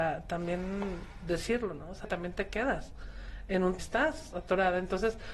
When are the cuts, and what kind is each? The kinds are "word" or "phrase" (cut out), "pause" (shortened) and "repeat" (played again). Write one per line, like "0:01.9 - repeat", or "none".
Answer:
0:02.0 - phrase
0:03.8 - phrase